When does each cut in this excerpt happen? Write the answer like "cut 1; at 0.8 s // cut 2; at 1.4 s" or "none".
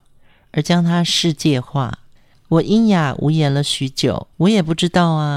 cut 1; at 2.2 s // cut 2; at 4.3 s